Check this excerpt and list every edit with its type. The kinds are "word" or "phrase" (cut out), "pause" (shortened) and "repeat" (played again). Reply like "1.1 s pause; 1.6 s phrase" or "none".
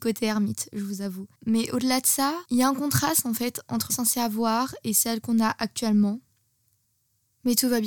1.4 s pause; 2.5 s pause; 3.9 s phrase